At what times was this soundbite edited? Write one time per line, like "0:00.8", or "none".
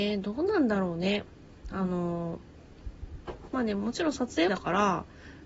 0:04.5